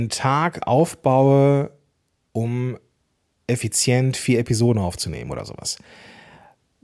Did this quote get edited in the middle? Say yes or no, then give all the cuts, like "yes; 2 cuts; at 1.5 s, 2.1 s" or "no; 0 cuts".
no; 0 cuts